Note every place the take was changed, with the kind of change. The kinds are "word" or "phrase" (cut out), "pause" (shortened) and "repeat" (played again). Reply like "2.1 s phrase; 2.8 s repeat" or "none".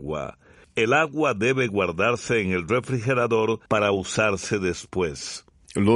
3.7 s pause